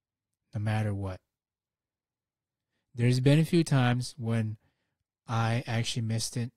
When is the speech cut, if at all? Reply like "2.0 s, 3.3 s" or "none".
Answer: none